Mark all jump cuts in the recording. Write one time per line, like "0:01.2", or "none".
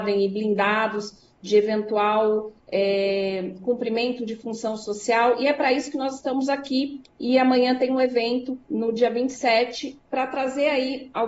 0:08.6